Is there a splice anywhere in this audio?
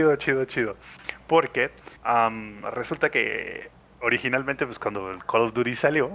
yes; 2 cuts; at 2.0 s, 3.8 s

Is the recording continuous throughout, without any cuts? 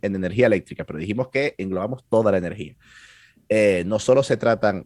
yes; 0 cuts

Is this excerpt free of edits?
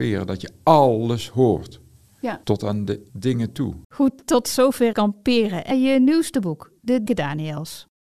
no; 6 cuts; at 2.4 s, 3.1 s, 3.8 s, 4.9 s, 5.7 s, 7.1 s

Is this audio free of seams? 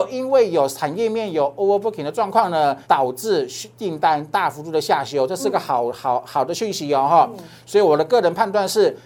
no; 1 cut; at 2.8 s

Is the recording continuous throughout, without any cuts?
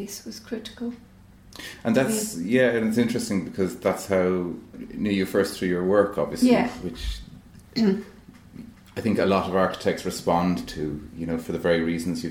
yes; 0 cuts

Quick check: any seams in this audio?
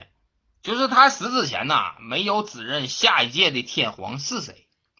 no; 0 cuts

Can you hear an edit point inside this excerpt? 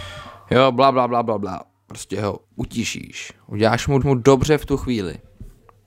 yes; 2 cuts; at 2.4 s, 4.0 s

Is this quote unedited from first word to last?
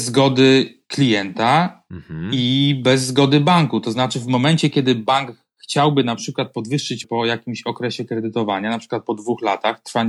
no; 1 cut; at 7.0 s

